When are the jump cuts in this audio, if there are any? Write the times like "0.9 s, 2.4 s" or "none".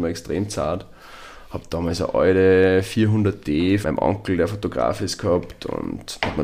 3.8 s

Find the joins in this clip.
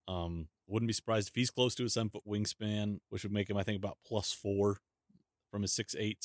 3.0 s

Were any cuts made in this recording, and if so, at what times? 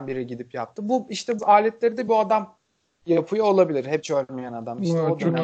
1.4 s, 2.1 s, 4.0 s

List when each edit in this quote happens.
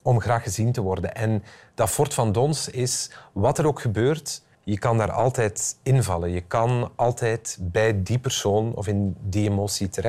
4.5 s

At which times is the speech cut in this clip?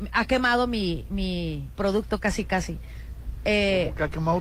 1.7 s

